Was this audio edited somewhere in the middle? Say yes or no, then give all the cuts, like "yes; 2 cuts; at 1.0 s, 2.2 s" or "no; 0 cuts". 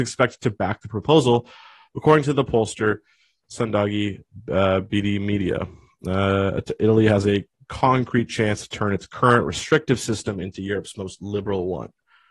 no; 0 cuts